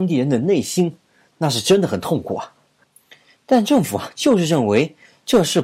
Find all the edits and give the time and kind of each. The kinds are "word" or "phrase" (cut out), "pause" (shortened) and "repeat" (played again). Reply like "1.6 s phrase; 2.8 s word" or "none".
none

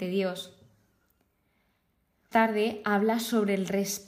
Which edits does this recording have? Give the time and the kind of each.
2.3 s word

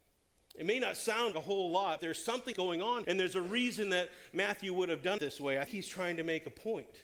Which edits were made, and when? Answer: 1.3 s word; 2.0 s word; 2.5 s word; 3.0 s word; 5.2 s word; 5.7 s word

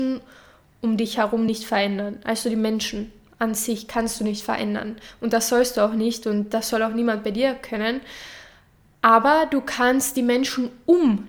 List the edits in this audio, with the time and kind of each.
none

